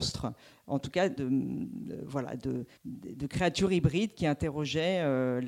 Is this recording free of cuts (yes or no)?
no